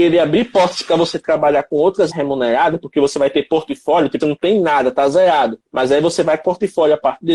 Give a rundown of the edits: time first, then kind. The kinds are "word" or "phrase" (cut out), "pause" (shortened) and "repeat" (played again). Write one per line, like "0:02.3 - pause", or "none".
0:02.1 - word
0:04.2 - word
0:05.7 - pause
0:06.4 - word

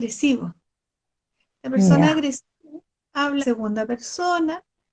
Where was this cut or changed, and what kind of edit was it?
0:03.4 - word

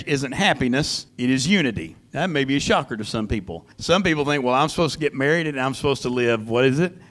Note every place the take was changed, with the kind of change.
0:01.1 - pause
0:02.1 - pause
0:03.7 - pause

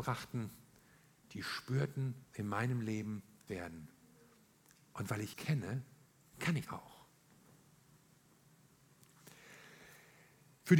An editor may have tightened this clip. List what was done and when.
0:02.2 - pause
0:03.5 - phrase
0:05.3 - word
0:06.7 - word

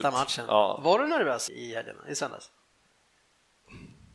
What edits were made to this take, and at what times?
0:01.5 - word

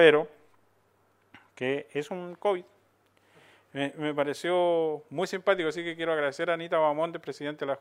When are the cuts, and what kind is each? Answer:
none

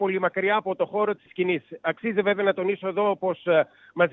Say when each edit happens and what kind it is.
0:01.3 - word

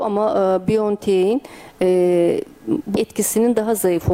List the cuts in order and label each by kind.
0:03.0 - word

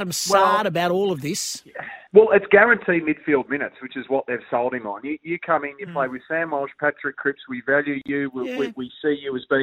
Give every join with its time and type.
0:02.1 - pause

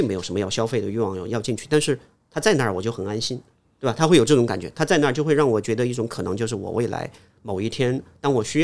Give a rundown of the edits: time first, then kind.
0:03.7 - pause

